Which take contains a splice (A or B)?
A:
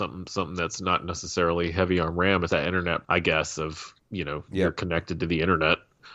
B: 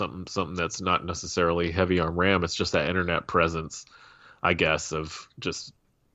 A